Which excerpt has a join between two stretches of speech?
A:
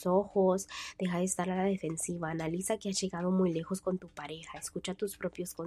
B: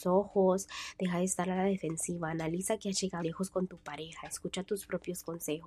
B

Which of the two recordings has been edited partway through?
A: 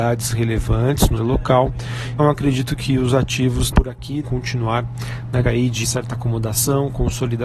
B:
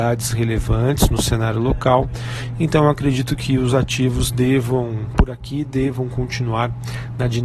A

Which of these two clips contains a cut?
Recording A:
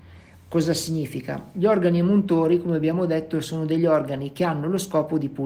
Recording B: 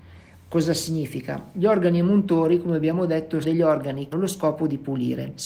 B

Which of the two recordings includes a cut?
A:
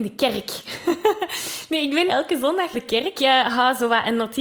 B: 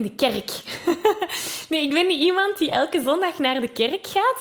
A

